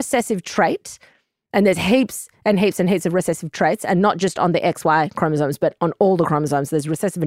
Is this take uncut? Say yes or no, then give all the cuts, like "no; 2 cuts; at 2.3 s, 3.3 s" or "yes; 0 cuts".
yes; 0 cuts